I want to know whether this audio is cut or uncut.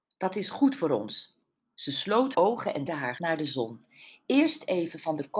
cut